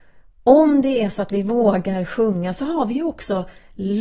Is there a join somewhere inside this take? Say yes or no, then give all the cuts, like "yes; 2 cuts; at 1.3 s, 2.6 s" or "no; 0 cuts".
no; 0 cuts